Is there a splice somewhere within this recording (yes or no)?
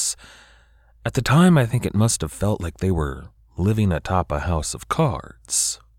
no